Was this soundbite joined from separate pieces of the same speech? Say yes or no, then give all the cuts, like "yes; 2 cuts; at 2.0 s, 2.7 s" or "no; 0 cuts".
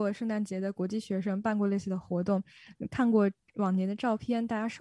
no; 0 cuts